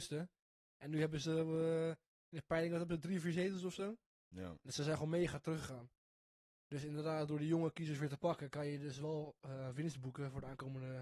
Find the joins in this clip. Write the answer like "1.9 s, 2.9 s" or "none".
none